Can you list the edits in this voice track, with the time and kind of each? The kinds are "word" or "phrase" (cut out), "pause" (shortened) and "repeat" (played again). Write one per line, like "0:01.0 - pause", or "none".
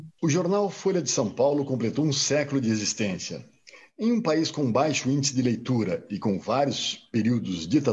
none